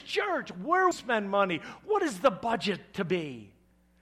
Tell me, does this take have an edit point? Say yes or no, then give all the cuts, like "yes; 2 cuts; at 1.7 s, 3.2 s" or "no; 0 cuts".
yes; 1 cut; at 0.9 s